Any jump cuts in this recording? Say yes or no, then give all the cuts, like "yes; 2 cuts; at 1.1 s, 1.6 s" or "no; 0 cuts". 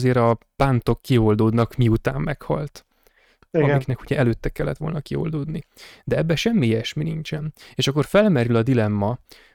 no; 0 cuts